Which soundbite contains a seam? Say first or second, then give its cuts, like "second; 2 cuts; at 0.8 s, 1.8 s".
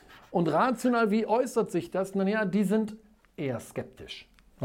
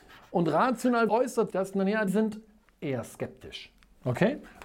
second; 3 cuts; at 1.1 s, 1.5 s, 2.1 s